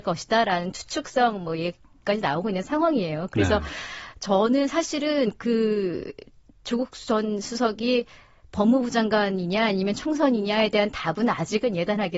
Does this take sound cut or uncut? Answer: uncut